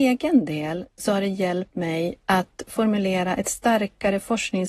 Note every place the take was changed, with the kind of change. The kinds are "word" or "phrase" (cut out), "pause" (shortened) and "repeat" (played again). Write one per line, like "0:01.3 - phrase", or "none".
none